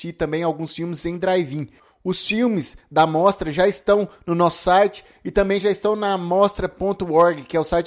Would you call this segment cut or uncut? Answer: uncut